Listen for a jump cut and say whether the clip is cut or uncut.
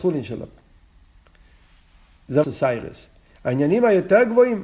cut